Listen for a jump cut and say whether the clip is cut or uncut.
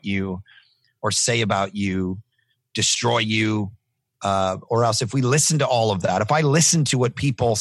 uncut